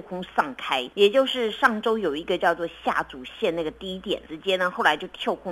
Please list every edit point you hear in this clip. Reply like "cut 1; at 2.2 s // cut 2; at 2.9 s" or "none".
cut 1; at 0.9 s // cut 2; at 4.3 s